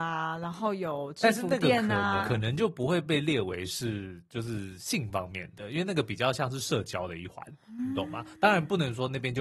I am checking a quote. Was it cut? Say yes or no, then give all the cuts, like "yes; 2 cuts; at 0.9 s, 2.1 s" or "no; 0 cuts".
yes; 1 cut; at 2.2 s